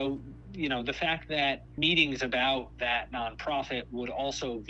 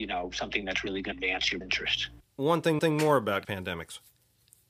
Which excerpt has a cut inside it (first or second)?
second